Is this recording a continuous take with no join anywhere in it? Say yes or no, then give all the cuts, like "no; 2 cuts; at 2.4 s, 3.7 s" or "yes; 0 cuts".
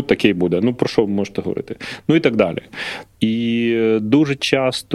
yes; 0 cuts